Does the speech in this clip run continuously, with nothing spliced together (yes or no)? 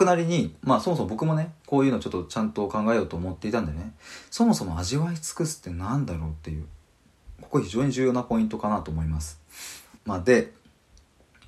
no